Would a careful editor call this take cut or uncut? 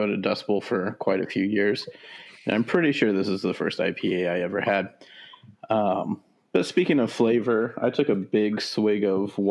uncut